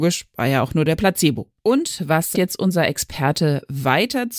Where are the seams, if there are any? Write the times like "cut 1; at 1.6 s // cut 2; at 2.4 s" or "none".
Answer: cut 1; at 1.6 s // cut 2; at 2.3 s